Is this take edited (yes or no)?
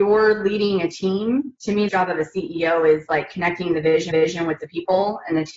yes